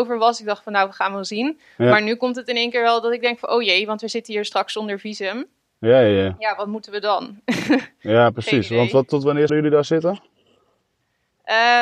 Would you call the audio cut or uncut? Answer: cut